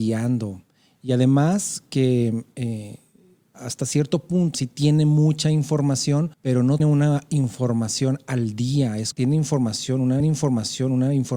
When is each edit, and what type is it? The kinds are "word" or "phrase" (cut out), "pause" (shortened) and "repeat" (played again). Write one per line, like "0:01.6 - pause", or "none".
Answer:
0:03.5 - word
0:04.5 - word
0:06.3 - pause
0:06.8 - word
0:09.1 - word
0:10.2 - repeat